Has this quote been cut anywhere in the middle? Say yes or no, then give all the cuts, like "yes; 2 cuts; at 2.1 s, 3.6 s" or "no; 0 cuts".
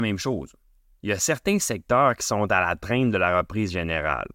no; 0 cuts